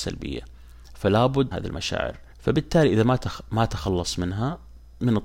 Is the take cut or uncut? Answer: cut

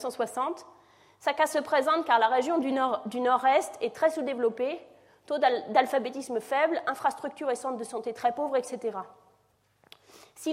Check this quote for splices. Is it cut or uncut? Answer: uncut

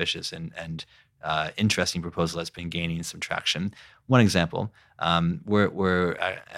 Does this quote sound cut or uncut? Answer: uncut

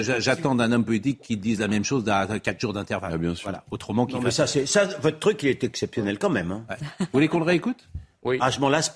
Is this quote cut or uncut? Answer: uncut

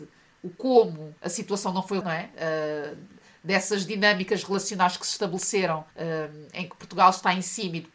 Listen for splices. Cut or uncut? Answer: cut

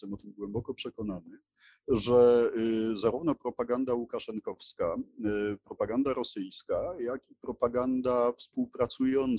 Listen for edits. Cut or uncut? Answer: uncut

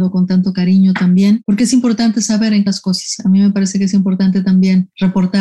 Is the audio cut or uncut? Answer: cut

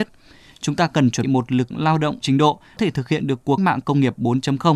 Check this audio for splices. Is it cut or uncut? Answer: cut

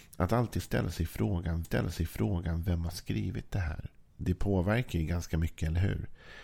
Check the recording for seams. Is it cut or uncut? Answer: cut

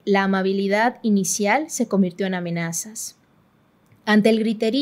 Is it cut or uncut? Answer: uncut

